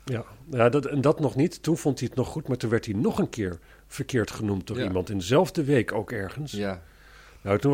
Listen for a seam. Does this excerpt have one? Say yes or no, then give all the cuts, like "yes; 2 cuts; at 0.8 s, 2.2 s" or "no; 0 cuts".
no; 0 cuts